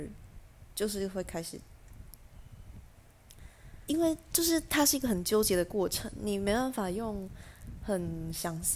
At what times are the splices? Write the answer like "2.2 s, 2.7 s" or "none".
3.9 s

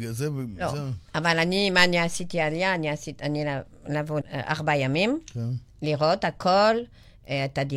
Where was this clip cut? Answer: 4.2 s

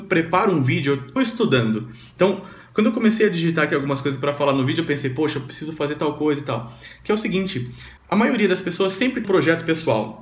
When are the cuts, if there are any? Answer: 1.2 s, 8.0 s, 9.2 s

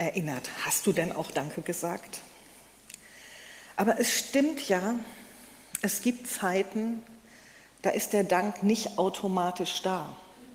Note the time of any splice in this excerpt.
none

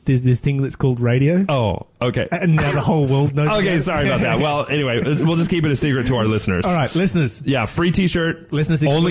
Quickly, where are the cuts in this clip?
1.9 s

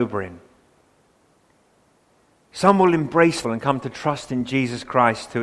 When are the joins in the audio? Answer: 3.4 s

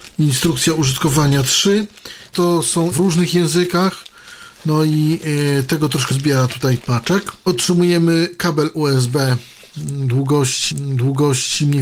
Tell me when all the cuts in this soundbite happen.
2.3 s, 2.9 s, 6.1 s, 6.8 s, 10.7 s

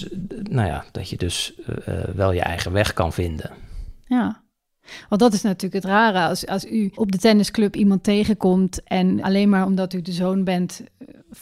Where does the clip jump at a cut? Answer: 6.9 s, 9.2 s

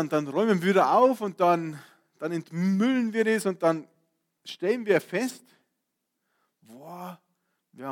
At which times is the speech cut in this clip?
none

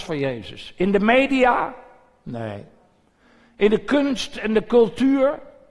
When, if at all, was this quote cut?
none

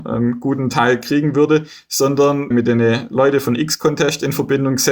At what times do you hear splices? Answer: 2.5 s

